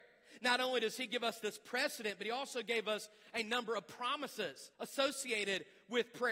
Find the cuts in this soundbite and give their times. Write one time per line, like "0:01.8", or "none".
0:04.7